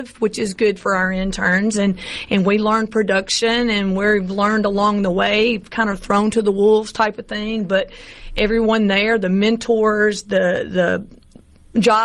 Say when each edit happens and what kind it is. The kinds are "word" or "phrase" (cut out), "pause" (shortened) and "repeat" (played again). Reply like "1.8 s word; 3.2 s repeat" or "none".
none

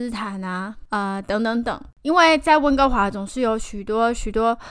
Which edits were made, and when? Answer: 1.9 s pause

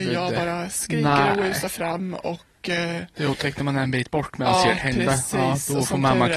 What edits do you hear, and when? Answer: none

